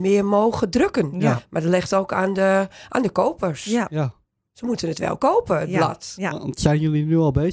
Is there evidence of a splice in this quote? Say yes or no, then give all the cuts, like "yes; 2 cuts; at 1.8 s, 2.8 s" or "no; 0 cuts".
no; 0 cuts